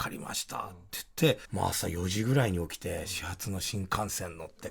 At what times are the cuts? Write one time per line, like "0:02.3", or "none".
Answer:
0:01.4